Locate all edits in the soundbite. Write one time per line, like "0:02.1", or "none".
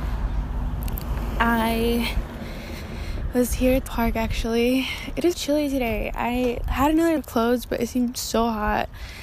0:03.9
0:05.3
0:07.2